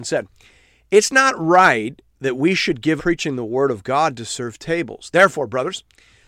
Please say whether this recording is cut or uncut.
cut